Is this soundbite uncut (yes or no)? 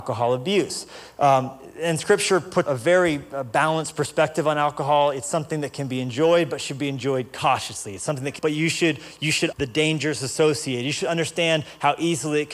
no